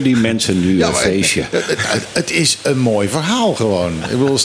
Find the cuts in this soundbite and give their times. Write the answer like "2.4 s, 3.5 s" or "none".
none